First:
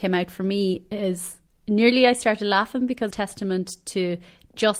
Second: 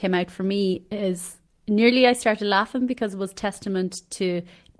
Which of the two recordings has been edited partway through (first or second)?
first